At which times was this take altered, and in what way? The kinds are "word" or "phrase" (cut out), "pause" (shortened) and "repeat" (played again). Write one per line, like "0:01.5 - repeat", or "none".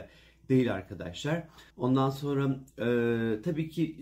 0:01.7 - pause

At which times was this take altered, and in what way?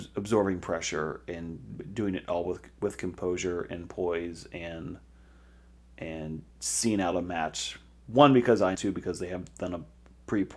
0:06.5 - pause
0:08.7 - phrase

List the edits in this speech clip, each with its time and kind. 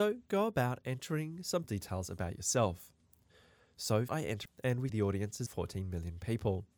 0:01.6 - word
0:04.1 - word
0:04.4 - word
0:04.9 - word
0:05.5 - word

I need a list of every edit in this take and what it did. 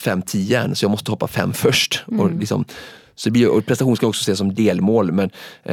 none

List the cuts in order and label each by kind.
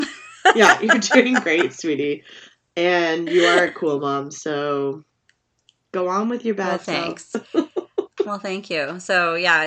none

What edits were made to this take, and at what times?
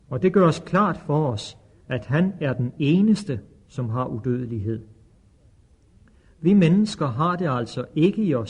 none

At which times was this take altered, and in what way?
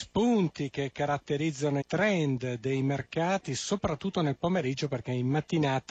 0:01.8 - word

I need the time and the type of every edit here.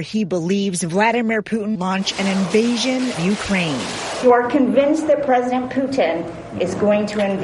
0:01.8 - word
0:03.1 - word

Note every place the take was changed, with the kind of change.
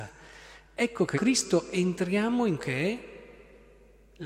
0:01.1 - phrase
0:02.6 - word

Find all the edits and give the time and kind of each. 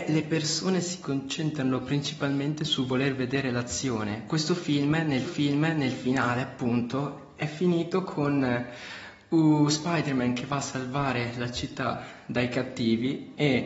0:05.2 - repeat

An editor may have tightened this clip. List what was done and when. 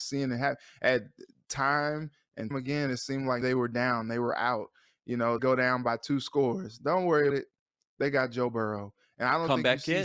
0:02.5 - word
0:03.4 - word
0:05.4 - word
0:07.3 - word

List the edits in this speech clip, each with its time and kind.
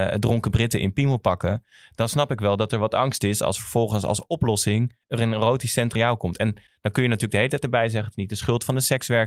0:05.0 - pause
0:06.0 - word

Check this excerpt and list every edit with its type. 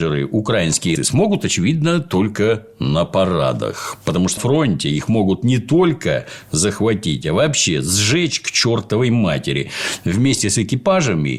0:01.0 - word
0:04.4 - word

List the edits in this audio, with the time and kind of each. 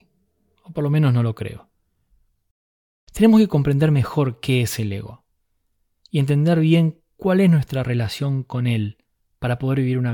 none

